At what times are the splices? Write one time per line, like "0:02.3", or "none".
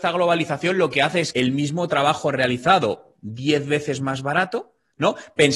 0:01.3